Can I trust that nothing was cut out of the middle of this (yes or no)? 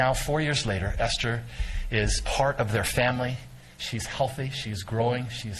yes